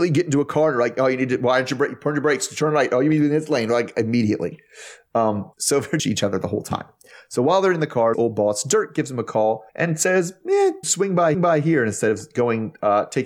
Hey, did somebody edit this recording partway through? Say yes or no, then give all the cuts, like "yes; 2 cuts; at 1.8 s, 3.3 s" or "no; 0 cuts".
yes; 6 cuts; at 5.5 s, 6.0 s, 8.1 s, 9.7 s, 10.8 s, 11.3 s